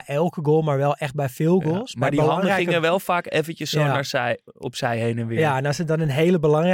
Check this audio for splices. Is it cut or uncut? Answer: uncut